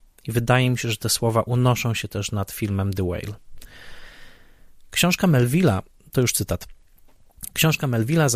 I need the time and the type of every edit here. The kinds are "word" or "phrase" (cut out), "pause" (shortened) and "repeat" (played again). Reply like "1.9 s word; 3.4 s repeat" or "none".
none